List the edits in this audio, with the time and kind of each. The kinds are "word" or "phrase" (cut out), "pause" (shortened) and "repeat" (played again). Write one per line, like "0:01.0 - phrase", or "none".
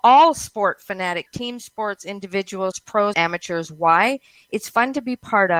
0:01.3 - word
0:02.7 - word
0:03.1 - word